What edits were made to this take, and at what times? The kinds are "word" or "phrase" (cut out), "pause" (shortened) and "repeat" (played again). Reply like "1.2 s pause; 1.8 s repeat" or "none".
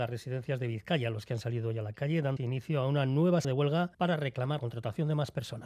2.4 s word; 3.4 s word; 3.9 s pause; 4.6 s word